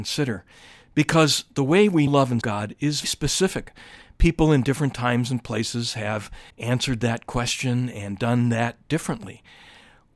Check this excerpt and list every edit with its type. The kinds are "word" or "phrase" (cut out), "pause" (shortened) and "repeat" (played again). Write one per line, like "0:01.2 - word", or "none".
0:02.1 - word
0:02.4 - word
0:03.0 - word
0:06.5 - pause